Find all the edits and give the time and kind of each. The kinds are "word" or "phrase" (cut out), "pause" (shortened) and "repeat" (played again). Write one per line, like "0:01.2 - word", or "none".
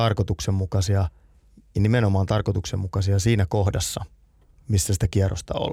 none

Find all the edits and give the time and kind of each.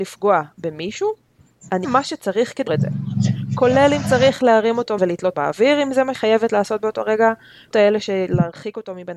0:01.8 - word
0:02.7 - word
0:05.0 - word
0:05.3 - word
0:06.1 - word
0:07.7 - word

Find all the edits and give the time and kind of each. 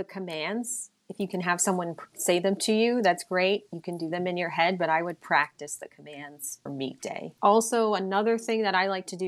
0:01.0 - pause
0:06.7 - word
0:07.4 - pause

